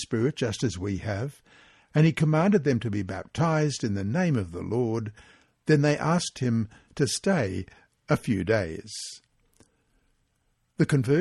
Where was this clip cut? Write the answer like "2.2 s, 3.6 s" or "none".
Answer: none